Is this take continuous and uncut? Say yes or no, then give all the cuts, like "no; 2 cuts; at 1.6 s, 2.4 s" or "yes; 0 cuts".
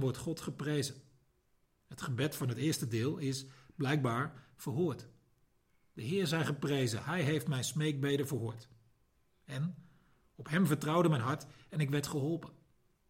yes; 0 cuts